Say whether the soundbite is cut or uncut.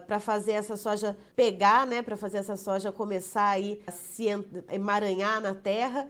cut